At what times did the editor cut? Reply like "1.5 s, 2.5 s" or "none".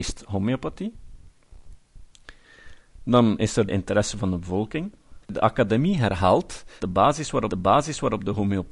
3.7 s, 5.2 s, 6.8 s, 7.5 s